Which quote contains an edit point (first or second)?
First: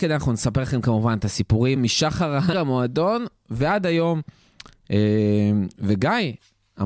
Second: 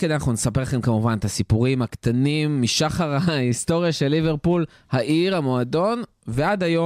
first